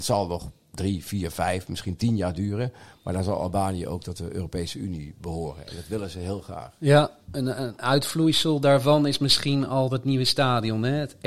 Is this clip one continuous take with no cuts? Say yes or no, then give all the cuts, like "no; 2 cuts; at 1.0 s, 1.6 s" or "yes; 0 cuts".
yes; 0 cuts